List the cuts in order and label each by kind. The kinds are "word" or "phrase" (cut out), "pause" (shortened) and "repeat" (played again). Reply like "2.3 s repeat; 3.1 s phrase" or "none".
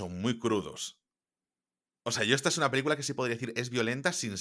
none